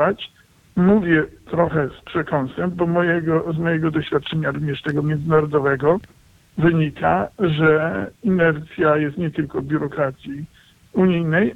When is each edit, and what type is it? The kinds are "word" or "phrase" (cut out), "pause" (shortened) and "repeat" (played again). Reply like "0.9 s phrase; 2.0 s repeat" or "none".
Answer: none